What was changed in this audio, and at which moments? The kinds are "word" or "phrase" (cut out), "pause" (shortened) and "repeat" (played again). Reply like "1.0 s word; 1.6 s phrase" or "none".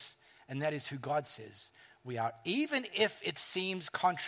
none

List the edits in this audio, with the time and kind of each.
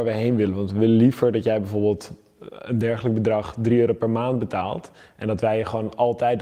none

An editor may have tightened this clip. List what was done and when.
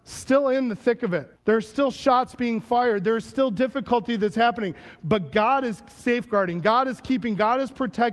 1.4 s pause

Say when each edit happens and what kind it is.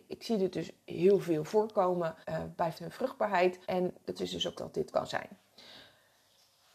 2.2 s pause; 2.7 s phrase; 3.6 s pause; 4.2 s word; 4.6 s word; 4.9 s phrase

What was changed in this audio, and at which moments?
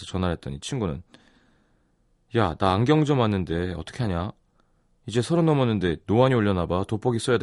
none

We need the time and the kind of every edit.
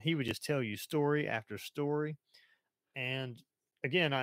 none

